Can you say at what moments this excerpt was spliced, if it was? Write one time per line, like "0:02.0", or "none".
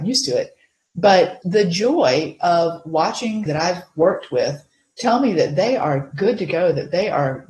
0:01.4
0:03.5